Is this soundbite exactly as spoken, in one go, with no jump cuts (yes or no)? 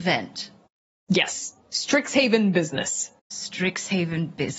no